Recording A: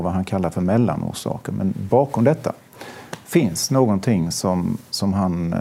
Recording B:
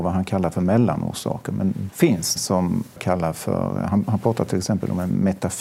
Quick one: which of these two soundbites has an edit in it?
B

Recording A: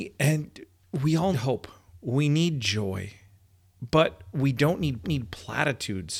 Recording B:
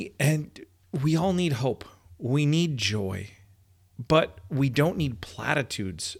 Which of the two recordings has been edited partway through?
A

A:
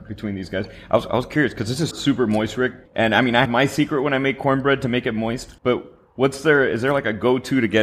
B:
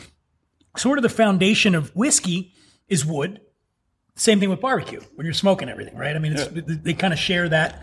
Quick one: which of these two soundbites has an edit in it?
A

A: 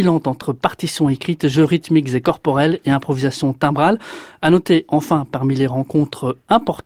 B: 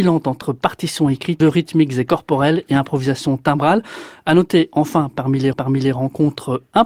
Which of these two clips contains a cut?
B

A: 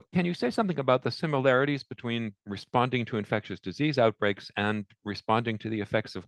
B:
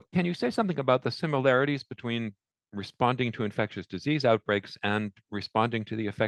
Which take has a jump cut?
A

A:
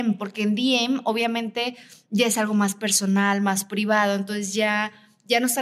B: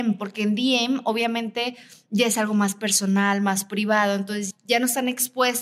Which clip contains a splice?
B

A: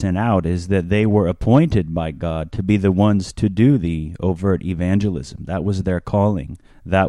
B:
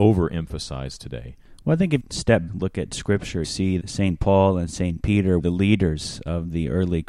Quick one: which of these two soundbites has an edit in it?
B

